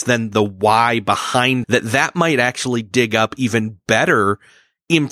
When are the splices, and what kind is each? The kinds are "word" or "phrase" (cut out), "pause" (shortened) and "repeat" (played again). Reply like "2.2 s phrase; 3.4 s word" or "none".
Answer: 1.6 s word